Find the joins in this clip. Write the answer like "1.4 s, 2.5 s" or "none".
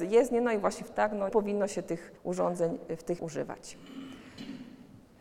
0.9 s, 1.3 s, 2.2 s, 3.2 s